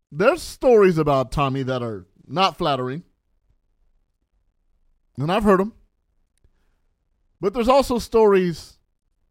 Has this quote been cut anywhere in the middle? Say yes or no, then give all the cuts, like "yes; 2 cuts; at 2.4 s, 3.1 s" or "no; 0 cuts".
no; 0 cuts